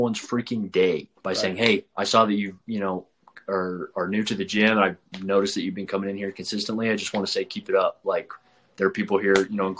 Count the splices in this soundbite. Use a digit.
1